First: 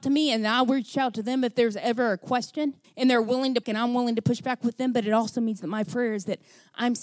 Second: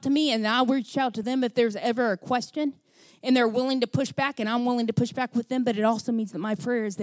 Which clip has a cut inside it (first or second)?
first